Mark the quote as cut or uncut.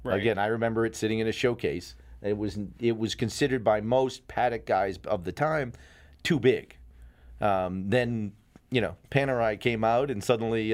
uncut